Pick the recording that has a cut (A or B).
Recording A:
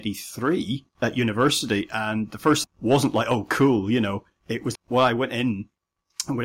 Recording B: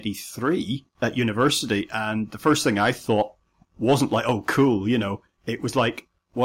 A